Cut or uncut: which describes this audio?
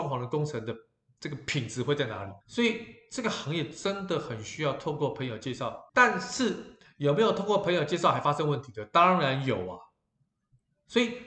cut